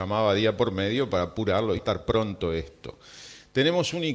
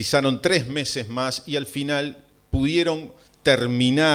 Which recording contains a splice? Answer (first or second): first